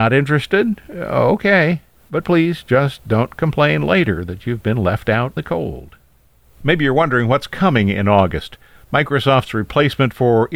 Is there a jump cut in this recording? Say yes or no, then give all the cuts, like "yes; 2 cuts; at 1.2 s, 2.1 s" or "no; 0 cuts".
yes; 1 cut; at 5.4 s